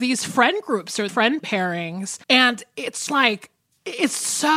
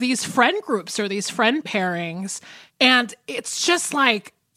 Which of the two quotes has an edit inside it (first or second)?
first